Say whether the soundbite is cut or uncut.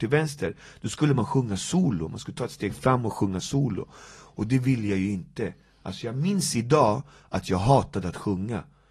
uncut